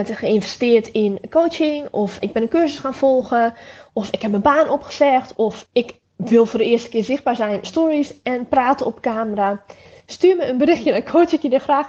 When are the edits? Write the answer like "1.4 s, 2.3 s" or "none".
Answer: 2.2 s, 5.7 s, 7.6 s